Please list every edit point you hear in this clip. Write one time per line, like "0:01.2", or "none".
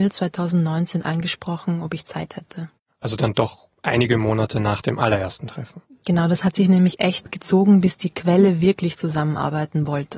0:02.8
0:03.7